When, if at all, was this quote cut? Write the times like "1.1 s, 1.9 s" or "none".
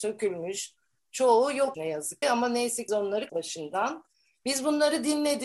1.7 s, 2.2 s, 2.9 s, 3.3 s